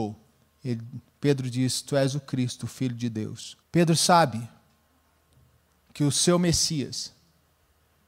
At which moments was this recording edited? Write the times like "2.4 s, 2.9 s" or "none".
3.6 s